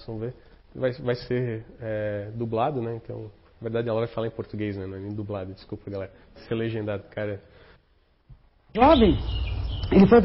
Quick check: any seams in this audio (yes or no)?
yes